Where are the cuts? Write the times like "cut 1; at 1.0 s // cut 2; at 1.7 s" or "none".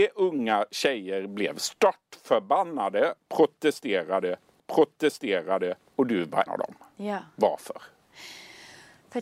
cut 1; at 4.6 s // cut 2; at 6.5 s